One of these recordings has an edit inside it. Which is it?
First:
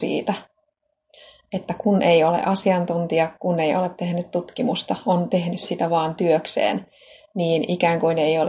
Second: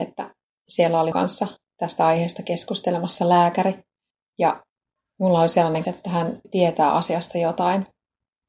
second; 3 cuts; at 1.1 s, 5.8 s, 6.4 s

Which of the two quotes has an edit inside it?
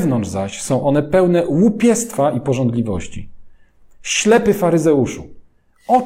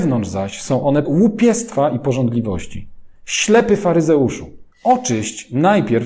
second; 3 cuts; at 1.1 s, 3.2 s, 4.7 s

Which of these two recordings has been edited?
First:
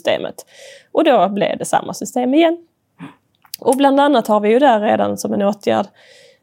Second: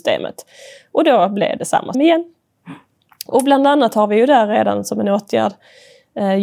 second; 1 cut; at 1.9 s

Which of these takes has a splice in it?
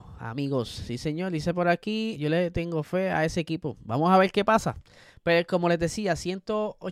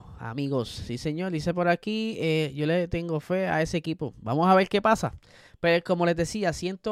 first; 1 cut; at 2.1 s

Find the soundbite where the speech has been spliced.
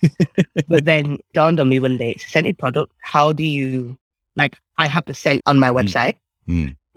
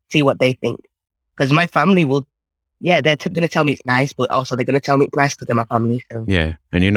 first; 3 cuts; at 1.3 s, 4.1 s, 5.4 s

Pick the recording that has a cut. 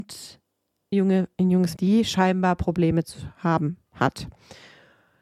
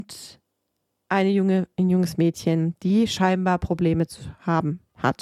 first; 2 cuts; at 0.9 s, 1.8 s

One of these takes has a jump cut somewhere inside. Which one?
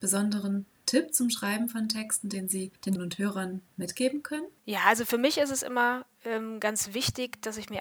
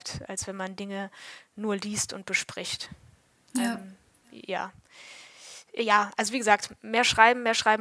first; 2 cuts; at 3.0 s, 4.6 s

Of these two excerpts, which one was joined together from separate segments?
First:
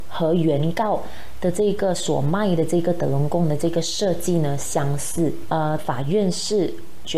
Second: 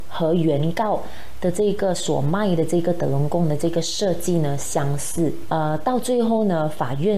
first; 1 cut; at 5.8 s

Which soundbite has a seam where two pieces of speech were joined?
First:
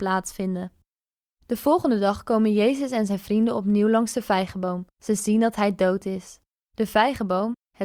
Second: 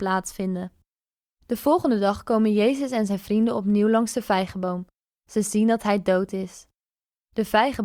first; 2 cuts; at 4.9 s, 6.5 s

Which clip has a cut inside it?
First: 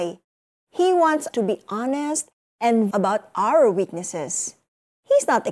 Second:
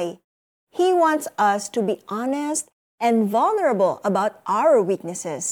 first; 2 cuts; at 1.3 s, 2.9 s

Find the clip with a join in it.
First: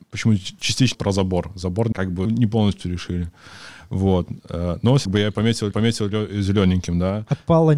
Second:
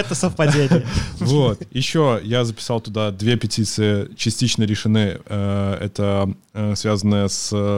first; 5 cuts; at 0.9 s, 1.9 s, 2.2 s, 5.0 s, 5.7 s

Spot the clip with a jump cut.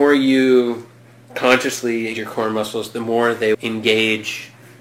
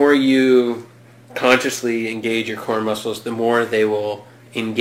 first; 2 cuts; at 2.1 s, 3.5 s

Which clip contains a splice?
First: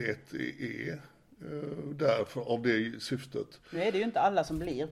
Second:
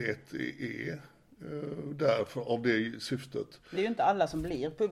second; 1 cut; at 3.7 s

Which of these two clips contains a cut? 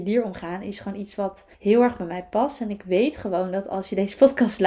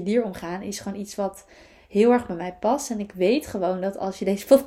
first; 1 cut; at 1.5 s

